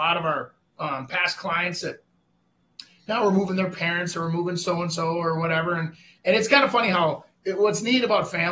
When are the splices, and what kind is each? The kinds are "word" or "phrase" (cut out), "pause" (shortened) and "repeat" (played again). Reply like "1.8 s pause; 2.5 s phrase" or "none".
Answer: none